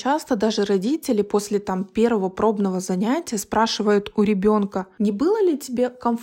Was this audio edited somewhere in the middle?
no; 0 cuts

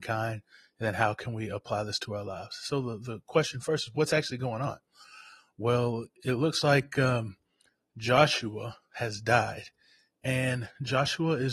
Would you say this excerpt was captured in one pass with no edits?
yes; 0 cuts

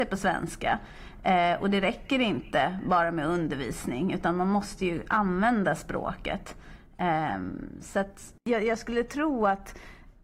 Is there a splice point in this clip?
yes; 1 cut; at 8.4 s

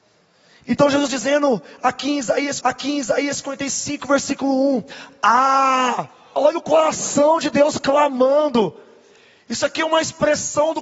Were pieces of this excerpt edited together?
yes; 3 cuts; at 1.1 s, 2.6 s, 6.4 s

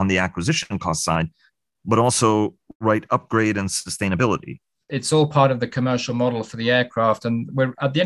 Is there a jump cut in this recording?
no; 0 cuts

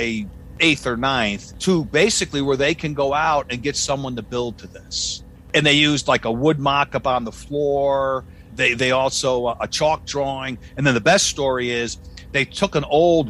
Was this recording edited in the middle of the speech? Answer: no; 0 cuts

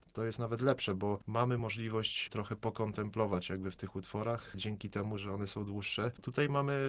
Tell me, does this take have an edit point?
no; 0 cuts

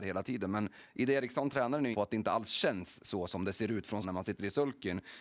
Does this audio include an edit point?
yes; 2 cuts; at 1.9 s, 4.0 s

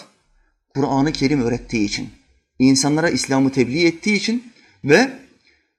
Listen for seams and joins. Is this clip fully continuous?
yes; 0 cuts

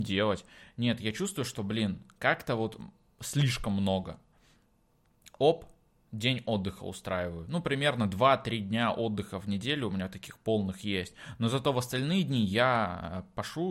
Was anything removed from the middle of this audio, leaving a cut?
no; 0 cuts

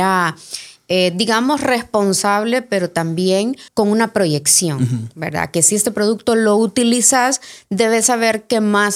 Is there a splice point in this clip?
yes; 1 cut; at 3.7 s

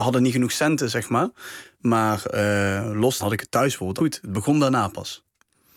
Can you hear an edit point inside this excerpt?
yes; 2 cuts; at 3.2 s, 4.0 s

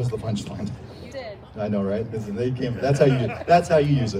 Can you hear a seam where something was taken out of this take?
yes; 1 cut; at 1.1 s

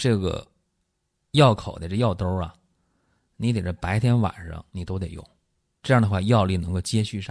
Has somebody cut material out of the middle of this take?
yes; 2 cuts; at 4.7 s, 5.8 s

